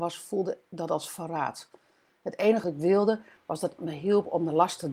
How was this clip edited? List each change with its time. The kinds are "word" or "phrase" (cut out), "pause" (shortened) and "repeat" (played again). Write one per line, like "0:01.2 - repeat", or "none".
0:02.6 - word
0:03.8 - word